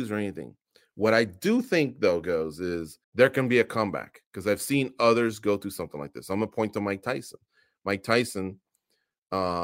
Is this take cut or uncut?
cut